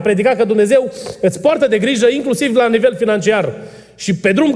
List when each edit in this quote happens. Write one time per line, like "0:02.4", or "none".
none

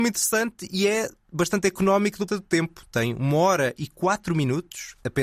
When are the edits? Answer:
0:02.3

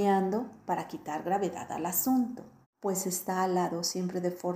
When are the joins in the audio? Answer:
0:02.6

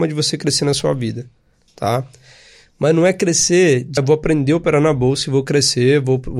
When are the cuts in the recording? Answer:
0:04.0

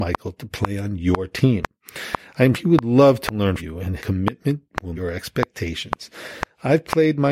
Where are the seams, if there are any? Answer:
0:02.5
0:03.6
0:04.0
0:05.0

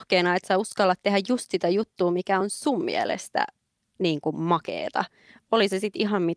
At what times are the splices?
none

